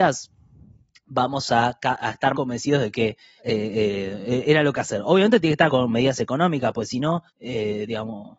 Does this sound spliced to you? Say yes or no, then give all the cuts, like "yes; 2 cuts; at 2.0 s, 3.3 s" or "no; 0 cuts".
yes; 5 cuts; at 2.3 s, 3.4 s, 4.7 s, 5.7 s, 7.3 s